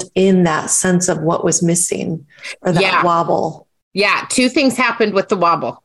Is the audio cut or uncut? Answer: uncut